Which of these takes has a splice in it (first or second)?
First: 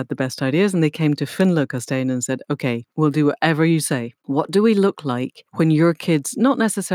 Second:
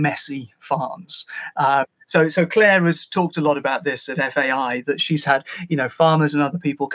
first